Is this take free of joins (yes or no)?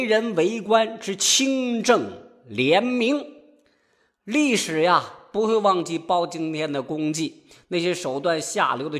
yes